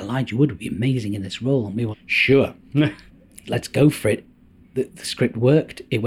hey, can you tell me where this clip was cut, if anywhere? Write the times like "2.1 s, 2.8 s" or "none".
1.9 s, 3.4 s